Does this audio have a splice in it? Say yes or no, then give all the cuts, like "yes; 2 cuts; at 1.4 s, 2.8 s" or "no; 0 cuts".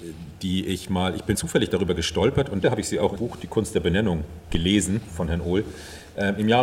yes; 4 cuts; at 1.3 s, 2.6 s, 3.2 s, 5.1 s